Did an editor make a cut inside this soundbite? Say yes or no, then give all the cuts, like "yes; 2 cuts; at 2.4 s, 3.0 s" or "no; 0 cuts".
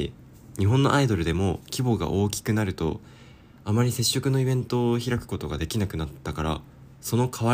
no; 0 cuts